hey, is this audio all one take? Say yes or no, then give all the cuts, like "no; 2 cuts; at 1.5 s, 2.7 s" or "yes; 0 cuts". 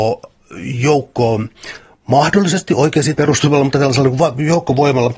no; 1 cut; at 3.2 s